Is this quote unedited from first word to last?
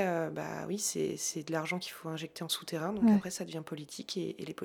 yes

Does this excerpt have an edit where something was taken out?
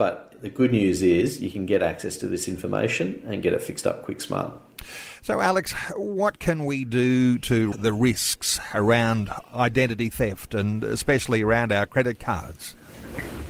yes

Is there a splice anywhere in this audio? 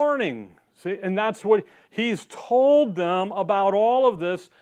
no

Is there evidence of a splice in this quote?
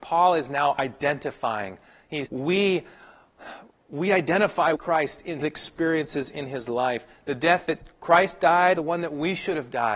yes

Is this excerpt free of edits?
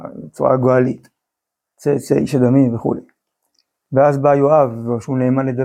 yes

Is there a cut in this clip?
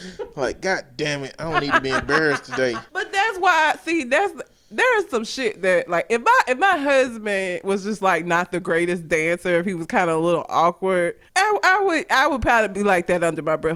yes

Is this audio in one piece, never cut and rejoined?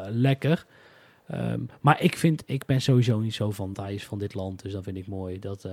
no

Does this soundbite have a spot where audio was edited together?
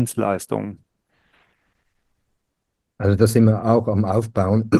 no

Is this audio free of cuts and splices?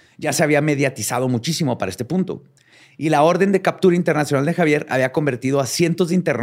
yes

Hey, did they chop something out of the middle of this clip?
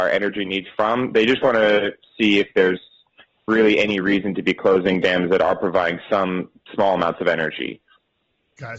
no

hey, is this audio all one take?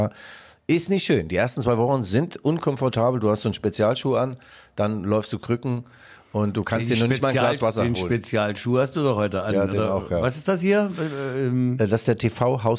yes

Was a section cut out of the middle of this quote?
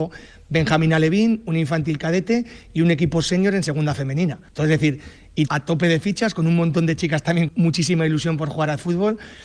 yes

